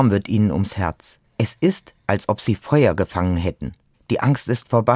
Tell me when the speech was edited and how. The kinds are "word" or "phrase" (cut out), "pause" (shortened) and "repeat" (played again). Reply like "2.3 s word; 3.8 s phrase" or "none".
1.3 s pause; 3.9 s pause